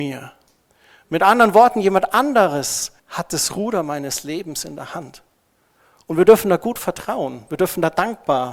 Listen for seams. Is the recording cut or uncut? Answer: cut